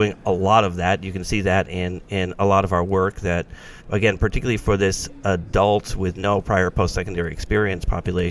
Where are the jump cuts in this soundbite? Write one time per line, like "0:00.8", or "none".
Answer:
0:03.8